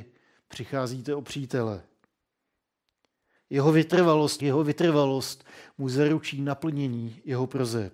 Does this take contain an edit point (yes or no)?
yes